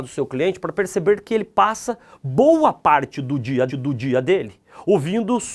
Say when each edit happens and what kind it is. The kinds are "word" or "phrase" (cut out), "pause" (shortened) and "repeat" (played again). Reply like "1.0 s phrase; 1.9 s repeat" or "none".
3.7 s repeat